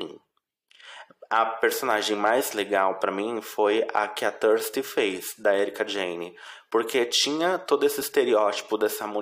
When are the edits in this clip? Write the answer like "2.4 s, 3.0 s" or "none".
none